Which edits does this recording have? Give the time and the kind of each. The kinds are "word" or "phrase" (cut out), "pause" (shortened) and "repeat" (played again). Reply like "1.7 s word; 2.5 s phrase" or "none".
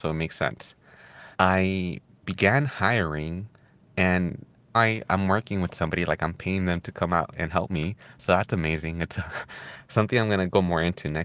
1.3 s pause; 4.7 s word